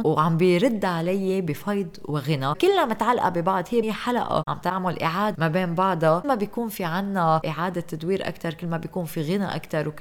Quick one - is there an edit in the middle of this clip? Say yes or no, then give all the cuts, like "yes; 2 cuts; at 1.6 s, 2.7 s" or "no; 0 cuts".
yes; 3 cuts; at 3.8 s, 5.3 s, 6.2 s